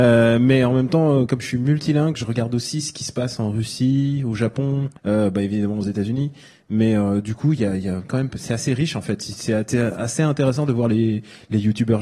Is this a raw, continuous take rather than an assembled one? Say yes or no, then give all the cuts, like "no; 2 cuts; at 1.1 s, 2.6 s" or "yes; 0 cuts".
no; 1 cut; at 5.0 s